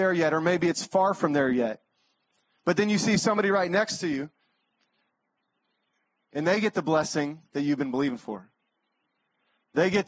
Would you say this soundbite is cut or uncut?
uncut